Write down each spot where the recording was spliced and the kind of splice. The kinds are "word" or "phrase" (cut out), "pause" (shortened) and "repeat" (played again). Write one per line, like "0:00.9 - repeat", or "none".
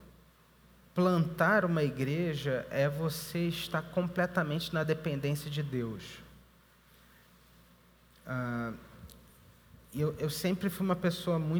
none

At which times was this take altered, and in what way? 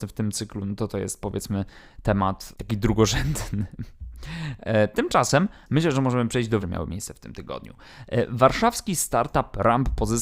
0:02.5 - word
0:06.6 - phrase

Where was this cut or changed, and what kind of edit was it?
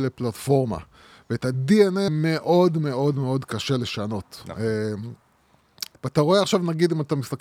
0:02.1 - word
0:05.9 - word

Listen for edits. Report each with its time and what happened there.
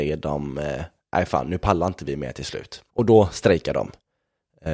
0:02.9 - pause

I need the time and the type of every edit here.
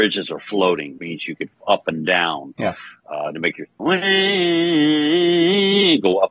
0:01.0 - word
0:01.6 - word
0:03.8 - word

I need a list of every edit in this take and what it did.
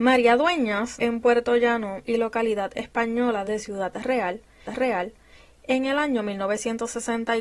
0:01.0 - word
0:02.0 - word
0:03.4 - phrase
0:04.7 - repeat

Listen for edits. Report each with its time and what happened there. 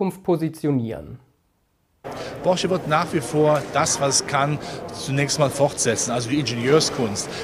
none

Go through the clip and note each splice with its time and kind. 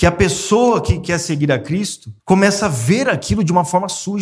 0:02.2 - pause

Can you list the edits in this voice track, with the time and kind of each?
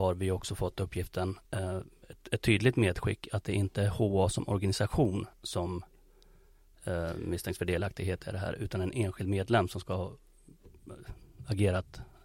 0:01.4 - pause
0:05.3 - pause

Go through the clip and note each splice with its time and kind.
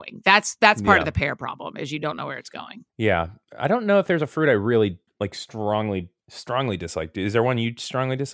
0:02.9 - pause
0:05.1 - pause
0:06.2 - pause

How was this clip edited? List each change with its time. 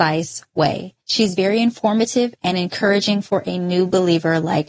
0:01.0 - pause

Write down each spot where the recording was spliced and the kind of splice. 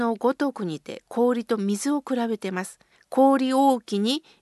0:02.9 - pause

